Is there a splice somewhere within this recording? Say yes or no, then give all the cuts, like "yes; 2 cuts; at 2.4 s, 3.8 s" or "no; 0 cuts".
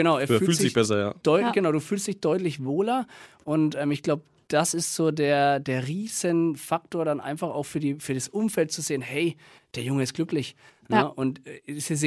no; 0 cuts